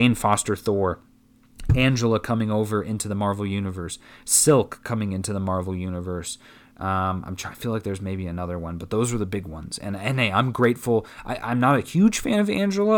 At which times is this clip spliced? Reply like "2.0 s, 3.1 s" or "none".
none